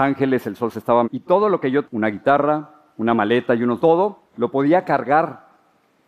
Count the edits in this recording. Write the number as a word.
five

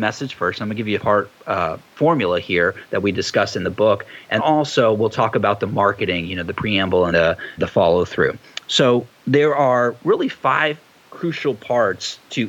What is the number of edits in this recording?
five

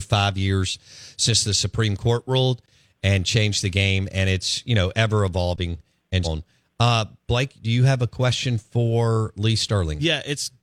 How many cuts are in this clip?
one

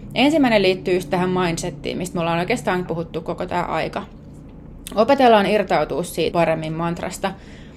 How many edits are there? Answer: two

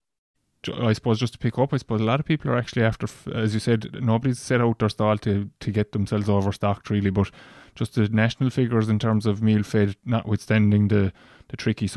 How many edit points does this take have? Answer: zero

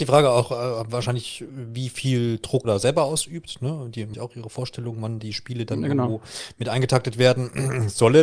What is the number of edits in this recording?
three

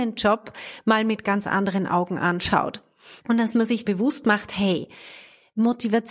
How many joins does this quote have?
two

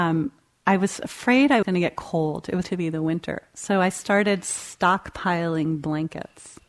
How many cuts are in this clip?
two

